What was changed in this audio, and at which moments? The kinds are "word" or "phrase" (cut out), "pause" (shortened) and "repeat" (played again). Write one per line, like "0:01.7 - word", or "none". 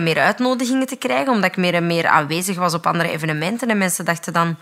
none